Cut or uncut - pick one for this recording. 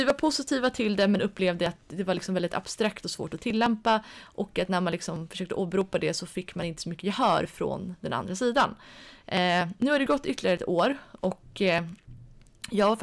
uncut